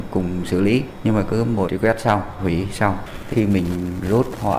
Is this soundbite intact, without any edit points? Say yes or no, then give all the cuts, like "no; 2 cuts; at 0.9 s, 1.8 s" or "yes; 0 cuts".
no; 2 cuts; at 1.6 s, 3.3 s